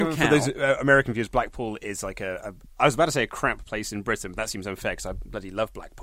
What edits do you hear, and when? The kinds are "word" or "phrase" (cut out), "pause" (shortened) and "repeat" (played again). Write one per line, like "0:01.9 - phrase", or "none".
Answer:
none